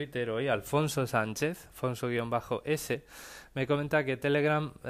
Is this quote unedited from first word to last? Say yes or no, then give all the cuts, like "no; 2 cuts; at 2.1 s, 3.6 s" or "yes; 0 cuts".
yes; 0 cuts